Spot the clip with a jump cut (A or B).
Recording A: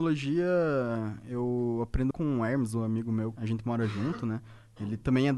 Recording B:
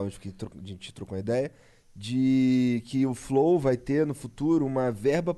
A